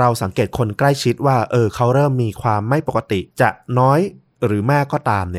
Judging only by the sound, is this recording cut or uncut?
cut